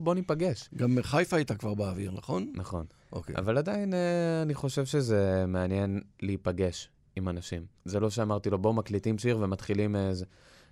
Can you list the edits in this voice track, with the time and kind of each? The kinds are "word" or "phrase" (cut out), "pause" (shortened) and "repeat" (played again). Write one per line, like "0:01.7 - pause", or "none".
0:06.1 - pause
0:07.8 - pause